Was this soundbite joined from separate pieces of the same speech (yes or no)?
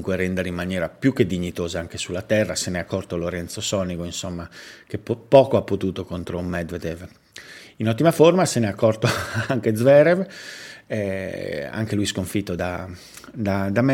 no